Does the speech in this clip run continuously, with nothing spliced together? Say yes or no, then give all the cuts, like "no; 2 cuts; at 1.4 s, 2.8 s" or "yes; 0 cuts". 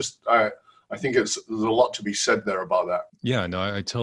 no; 1 cut; at 3.1 s